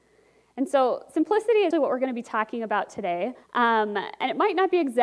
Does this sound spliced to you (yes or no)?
yes